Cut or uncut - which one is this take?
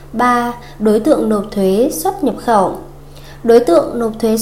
uncut